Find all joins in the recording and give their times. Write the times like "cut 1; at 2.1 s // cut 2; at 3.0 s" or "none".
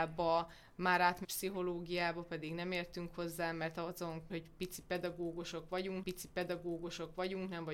cut 1; at 1.2 s // cut 2; at 4.3 s // cut 3; at 6.0 s

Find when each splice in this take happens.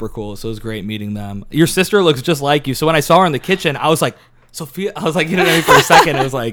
none

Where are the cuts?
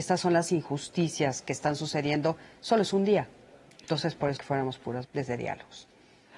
cut 1; at 4.4 s // cut 2; at 5.0 s

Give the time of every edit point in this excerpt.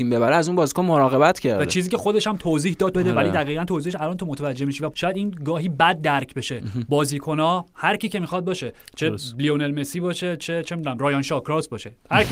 cut 1; at 2.9 s // cut 2; at 4.9 s

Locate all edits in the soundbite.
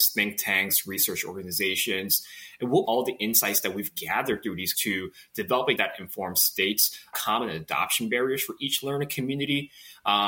cut 1; at 2.9 s // cut 2; at 4.7 s // cut 3; at 5.8 s // cut 4; at 7.1 s

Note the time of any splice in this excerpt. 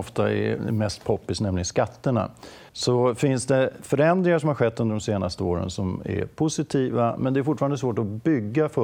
cut 1; at 2.7 s

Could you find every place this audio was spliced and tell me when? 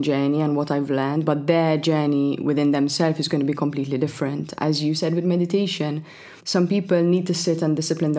cut 1; at 6.4 s

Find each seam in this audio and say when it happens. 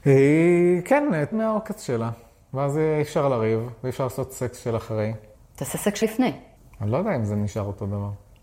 cut 1; at 1.3 s // cut 2; at 6.0 s

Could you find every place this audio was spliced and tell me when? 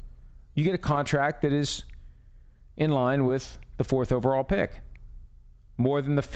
none

